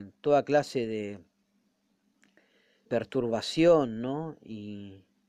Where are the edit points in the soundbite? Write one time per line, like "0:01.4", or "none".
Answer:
0:02.8